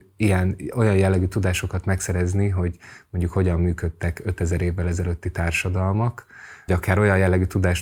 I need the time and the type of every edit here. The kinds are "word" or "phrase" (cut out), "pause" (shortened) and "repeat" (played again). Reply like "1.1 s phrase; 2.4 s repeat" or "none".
6.7 s word

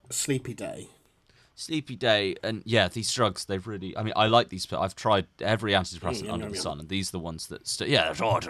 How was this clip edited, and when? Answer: none

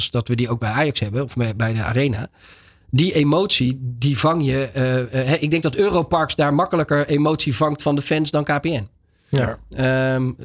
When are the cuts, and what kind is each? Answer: none

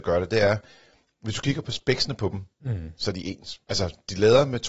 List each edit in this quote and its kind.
3.6 s pause

